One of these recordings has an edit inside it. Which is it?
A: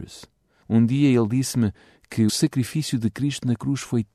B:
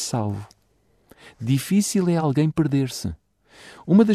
A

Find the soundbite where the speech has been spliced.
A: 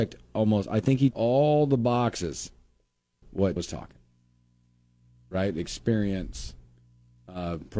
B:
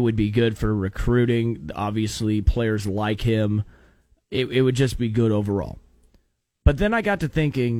A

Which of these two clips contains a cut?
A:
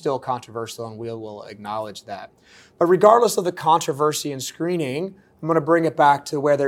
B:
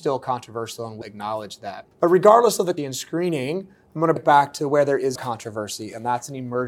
B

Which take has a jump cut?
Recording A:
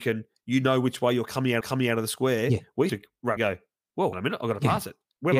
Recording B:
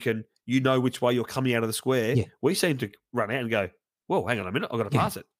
A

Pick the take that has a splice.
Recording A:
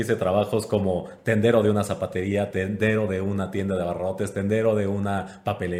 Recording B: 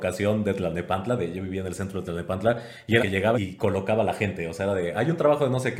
B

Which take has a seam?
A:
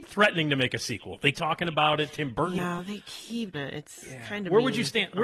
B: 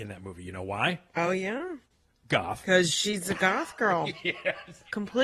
A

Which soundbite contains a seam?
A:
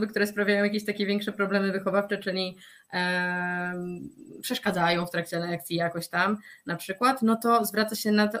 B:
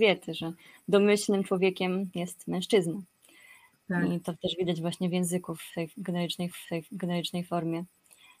B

